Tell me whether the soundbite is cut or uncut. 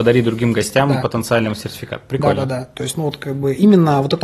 uncut